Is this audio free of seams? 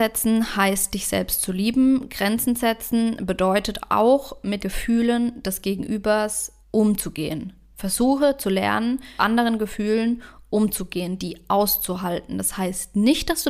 no; 3 cuts; at 4.6 s, 6.6 s, 9.2 s

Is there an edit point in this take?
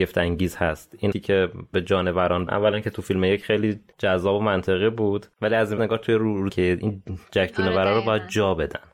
yes; 6 cuts; at 1.1 s, 1.7 s, 2.5 s, 3.9 s, 5.8 s, 6.5 s

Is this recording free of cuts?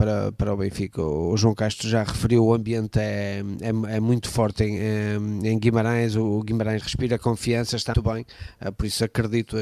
no; 2 cuts; at 6.8 s, 7.9 s

